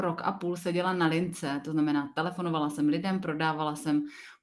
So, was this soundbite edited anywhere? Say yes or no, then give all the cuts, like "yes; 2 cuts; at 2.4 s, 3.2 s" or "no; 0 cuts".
no; 0 cuts